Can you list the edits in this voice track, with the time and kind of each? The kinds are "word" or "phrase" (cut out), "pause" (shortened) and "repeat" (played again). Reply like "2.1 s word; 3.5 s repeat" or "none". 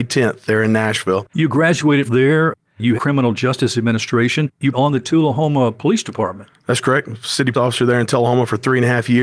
1.3 s pause; 2.1 s phrase; 3.0 s phrase; 4.7 s phrase; 7.5 s word